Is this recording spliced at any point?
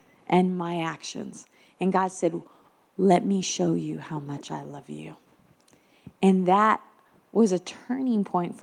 no; 0 cuts

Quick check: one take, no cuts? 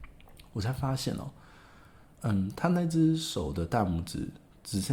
yes; 0 cuts

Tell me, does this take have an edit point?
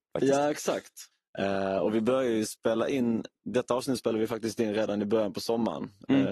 no; 0 cuts

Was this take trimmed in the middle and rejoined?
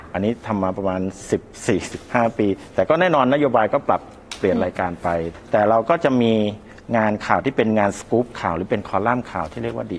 no; 0 cuts

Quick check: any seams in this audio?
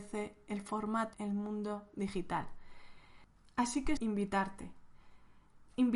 yes; 2 cuts; at 1.1 s, 4.0 s

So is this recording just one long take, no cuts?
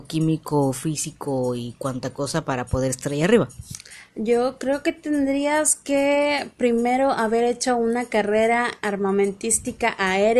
yes; 0 cuts

